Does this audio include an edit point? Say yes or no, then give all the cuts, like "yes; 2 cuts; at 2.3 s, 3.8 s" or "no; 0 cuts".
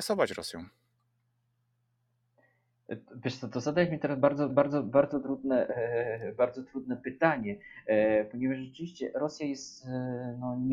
yes; 1 cut; at 4.5 s